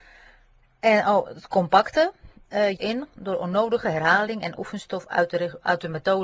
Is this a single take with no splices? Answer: no; 1 cut; at 2.8 s

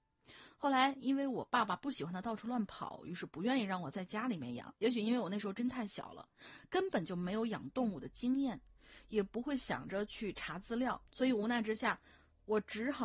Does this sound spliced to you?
yes; 2 cuts; at 4.8 s, 11.1 s

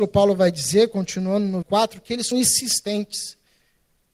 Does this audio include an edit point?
yes; 2 cuts; at 1.6 s, 2.3 s

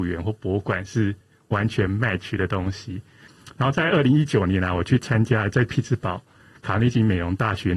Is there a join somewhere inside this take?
no; 0 cuts

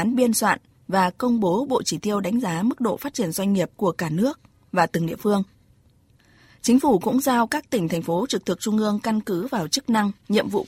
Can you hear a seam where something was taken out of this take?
yes; 1 cut; at 3.7 s

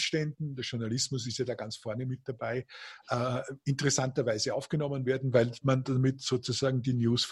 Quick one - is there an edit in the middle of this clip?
no; 0 cuts

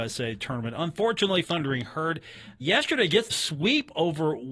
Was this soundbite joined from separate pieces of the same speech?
yes; 3 cuts; at 1.4 s, 2.6 s, 3.3 s

